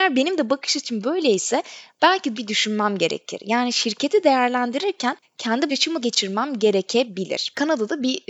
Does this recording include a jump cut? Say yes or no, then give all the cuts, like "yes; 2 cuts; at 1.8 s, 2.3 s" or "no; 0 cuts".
yes; 4 cuts; at 2.3 s, 5.2 s, 5.7 s, 6.0 s